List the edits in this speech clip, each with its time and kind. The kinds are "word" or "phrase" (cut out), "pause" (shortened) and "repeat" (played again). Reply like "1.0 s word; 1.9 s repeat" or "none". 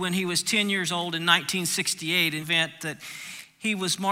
2.4 s phrase